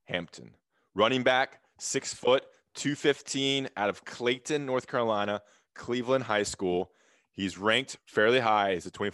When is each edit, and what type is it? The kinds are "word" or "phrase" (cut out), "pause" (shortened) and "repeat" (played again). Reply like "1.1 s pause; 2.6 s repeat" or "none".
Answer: none